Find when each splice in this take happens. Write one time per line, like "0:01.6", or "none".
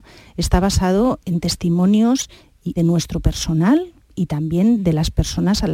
0:01.2
0:02.8
0:04.0